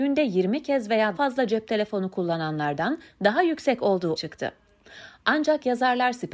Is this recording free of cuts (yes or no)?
no